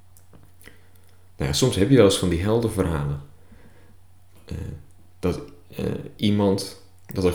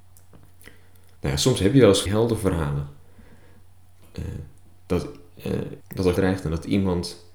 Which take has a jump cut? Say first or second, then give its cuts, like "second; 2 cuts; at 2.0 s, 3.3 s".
second; 4 cuts; at 1.2 s, 2.1 s, 5.8 s, 6.2 s